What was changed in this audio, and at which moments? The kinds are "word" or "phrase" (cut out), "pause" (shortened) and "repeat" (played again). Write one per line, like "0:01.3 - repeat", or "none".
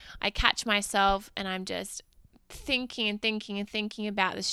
none

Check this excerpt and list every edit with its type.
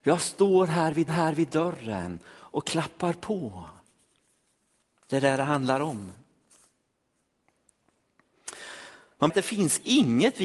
0:01.1 - repeat
0:09.3 - phrase

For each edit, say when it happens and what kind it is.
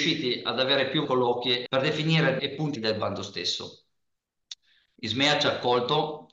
0:01.0 - word
0:01.7 - word
0:02.4 - word
0:02.8 - word

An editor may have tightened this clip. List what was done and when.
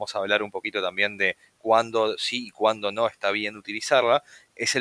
none

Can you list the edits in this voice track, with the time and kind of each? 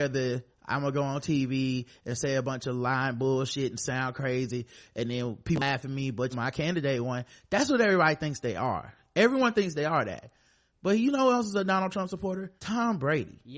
0:06.3 - phrase
0:12.6 - pause

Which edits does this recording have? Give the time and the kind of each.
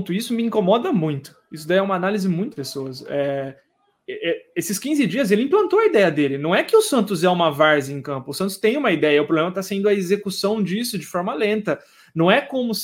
0:02.5 - phrase

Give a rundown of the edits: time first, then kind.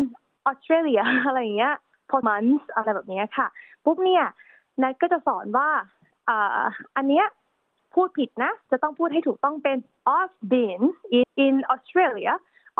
0:02.2 - word
0:11.2 - word

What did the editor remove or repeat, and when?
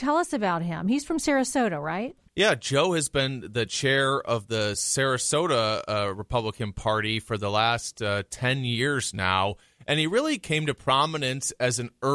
none

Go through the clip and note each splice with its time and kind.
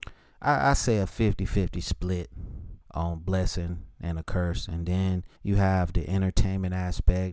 0:02.8 - pause
0:05.4 - pause

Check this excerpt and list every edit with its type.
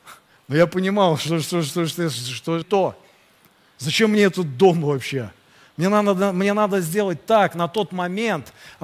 0:02.6 - phrase

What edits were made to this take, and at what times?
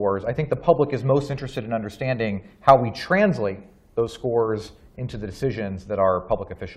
none

